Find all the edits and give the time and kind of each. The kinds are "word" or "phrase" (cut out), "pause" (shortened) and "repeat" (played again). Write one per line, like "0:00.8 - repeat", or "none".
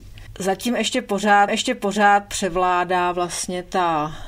0:01.5 - repeat